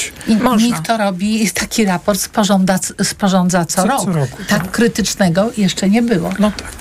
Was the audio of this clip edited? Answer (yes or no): no